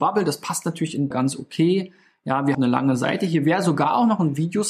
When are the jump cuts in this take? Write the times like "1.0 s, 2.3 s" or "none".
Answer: 1.1 s, 2.5 s